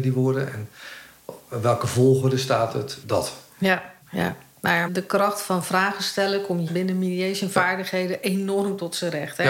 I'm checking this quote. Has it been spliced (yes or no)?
yes